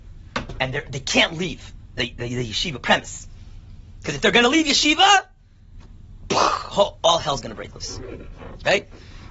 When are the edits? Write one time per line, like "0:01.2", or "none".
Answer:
none